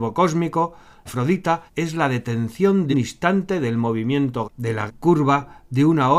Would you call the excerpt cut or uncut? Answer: cut